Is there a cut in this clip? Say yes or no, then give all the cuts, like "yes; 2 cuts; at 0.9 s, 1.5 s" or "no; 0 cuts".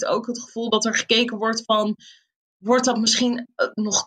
no; 0 cuts